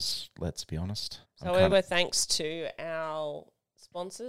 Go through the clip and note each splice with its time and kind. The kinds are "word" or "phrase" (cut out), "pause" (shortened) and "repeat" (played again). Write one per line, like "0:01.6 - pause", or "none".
0:01.2 - pause
0:01.7 - phrase